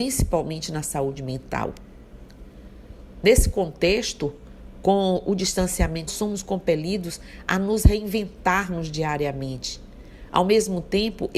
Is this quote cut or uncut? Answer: cut